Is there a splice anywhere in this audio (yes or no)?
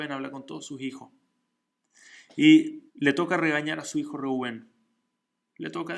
yes